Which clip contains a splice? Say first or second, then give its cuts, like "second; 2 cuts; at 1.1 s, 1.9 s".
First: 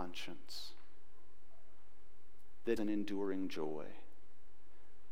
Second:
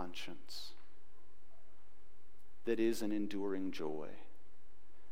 first; 1 cut; at 2.8 s